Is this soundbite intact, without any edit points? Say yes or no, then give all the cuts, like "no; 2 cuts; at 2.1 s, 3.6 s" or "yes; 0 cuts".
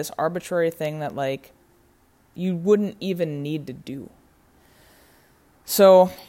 yes; 0 cuts